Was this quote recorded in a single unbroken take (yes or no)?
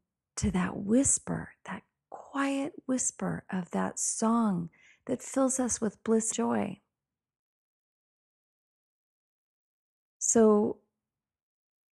no